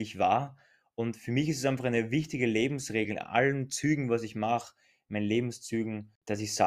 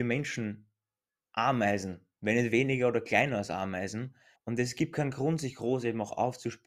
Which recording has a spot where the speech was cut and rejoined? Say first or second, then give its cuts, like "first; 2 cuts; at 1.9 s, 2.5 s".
second; 1 cut; at 4.3 s